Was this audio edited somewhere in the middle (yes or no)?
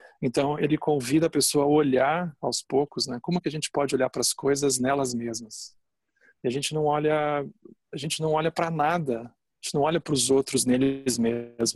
no